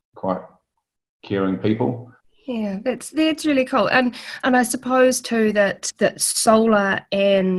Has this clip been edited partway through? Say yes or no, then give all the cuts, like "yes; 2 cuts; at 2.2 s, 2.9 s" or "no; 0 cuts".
yes; 2 cuts; at 2.2 s, 5.9 s